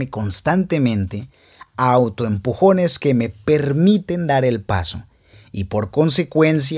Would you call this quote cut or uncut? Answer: uncut